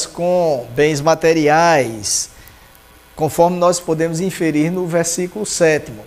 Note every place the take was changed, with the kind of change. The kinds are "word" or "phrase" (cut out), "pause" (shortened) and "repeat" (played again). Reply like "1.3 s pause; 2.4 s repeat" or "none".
none